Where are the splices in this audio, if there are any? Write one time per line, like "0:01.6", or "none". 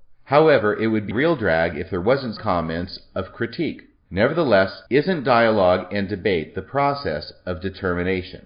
0:01.1
0:02.4
0:04.9